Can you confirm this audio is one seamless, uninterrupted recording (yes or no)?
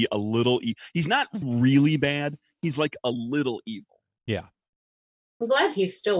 no